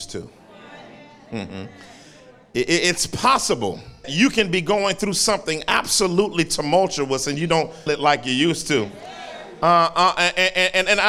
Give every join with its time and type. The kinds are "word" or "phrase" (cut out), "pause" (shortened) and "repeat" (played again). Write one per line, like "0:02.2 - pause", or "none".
0:04.0 - word
0:07.9 - word
0:09.9 - word